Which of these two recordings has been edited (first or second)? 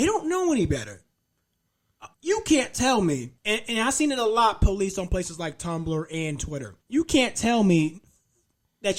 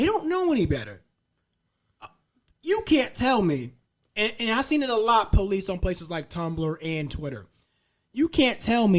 first